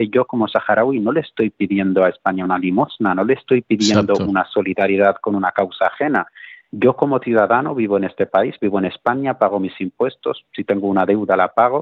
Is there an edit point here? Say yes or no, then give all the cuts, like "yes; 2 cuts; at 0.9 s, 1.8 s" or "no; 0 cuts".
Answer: no; 0 cuts